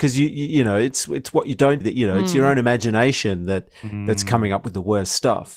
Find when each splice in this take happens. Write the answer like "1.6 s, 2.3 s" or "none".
1.8 s